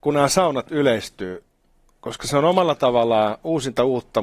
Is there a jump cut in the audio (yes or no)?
no